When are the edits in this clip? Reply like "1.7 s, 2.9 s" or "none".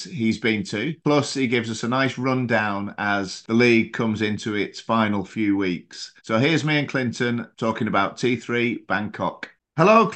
6.2 s

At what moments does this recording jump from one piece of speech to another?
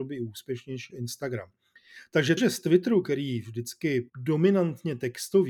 0.9 s, 2.4 s, 4.1 s

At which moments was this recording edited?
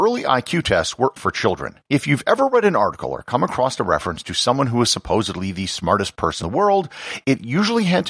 1.2 s, 1.9 s, 6.4 s

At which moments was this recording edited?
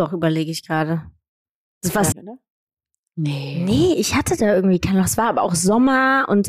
2.1 s

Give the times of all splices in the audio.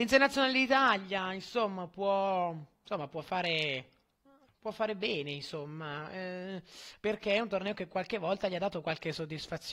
2.7 s, 4.1 s

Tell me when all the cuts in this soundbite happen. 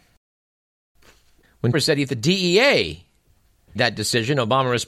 1.7 s, 2.1 s, 3.8 s

